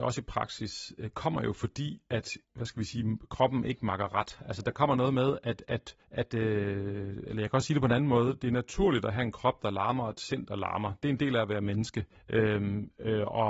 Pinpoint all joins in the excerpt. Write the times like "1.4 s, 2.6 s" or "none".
2.4 s, 6.0 s, 12.2 s